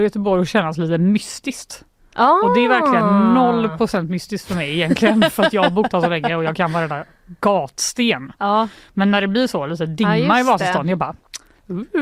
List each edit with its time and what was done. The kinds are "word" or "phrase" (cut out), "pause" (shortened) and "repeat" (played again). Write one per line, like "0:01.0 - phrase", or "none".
none